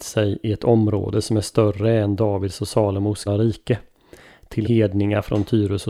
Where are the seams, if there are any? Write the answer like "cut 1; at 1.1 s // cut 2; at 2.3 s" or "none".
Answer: cut 1; at 3.3 s // cut 2; at 4.6 s